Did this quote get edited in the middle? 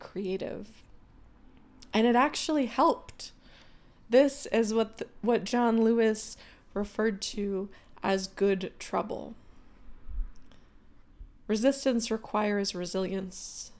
no; 0 cuts

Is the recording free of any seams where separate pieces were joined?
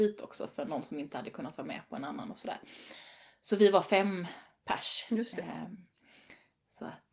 yes; 0 cuts

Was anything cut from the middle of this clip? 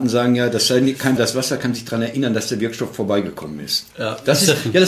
yes; 2 cuts; at 1.2 s, 3.9 s

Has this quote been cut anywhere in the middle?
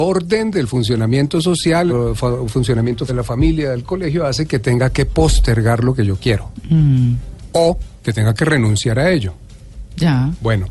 yes; 2 cuts; at 1.9 s, 3.1 s

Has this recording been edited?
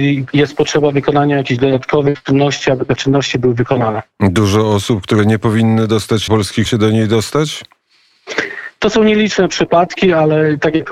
yes; 3 cuts; at 3.0 s, 6.3 s, 6.7 s

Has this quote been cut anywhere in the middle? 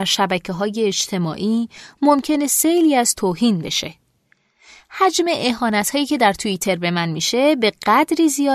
no; 0 cuts

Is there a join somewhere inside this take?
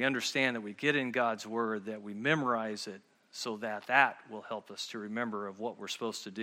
no; 0 cuts

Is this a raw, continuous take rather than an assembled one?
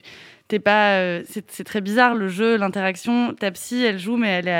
yes; 0 cuts

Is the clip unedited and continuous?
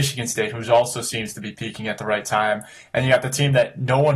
yes; 0 cuts

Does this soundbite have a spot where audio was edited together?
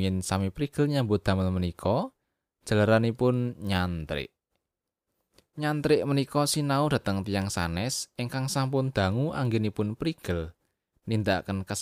no; 0 cuts

